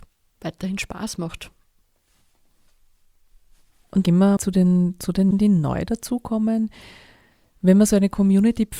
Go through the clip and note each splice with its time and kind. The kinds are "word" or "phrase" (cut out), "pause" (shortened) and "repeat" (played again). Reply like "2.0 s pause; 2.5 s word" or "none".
4.0 s word; 4.4 s word; 5.3 s word